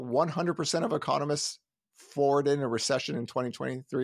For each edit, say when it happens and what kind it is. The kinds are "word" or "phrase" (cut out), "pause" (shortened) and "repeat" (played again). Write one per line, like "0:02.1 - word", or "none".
none